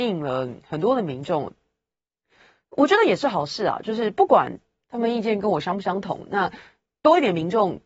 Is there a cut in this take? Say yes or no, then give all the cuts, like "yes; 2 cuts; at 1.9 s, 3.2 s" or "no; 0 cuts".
no; 0 cuts